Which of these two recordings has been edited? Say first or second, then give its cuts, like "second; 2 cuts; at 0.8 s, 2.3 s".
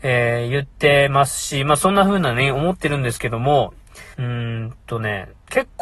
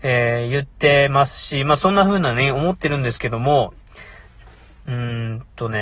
first; 1 cut; at 4.1 s